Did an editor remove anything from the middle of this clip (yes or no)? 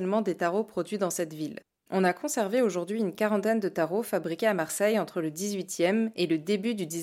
no